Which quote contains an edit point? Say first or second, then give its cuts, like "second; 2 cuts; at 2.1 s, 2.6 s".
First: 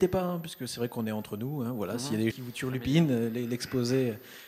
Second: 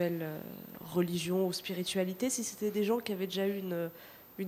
first; 1 cut; at 2.3 s